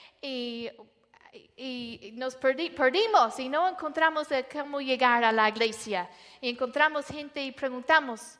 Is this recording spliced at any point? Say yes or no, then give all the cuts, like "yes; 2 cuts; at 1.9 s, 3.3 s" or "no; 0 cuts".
no; 0 cuts